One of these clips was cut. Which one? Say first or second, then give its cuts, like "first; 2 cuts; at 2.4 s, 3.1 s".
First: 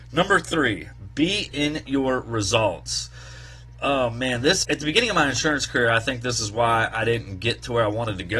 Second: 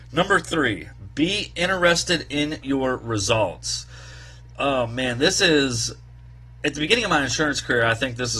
first; 2 cuts; at 1.5 s, 4.6 s